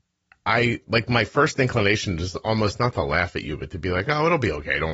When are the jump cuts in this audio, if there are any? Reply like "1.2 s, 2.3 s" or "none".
none